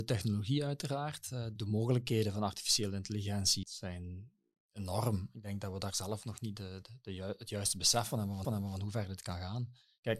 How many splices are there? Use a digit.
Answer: 4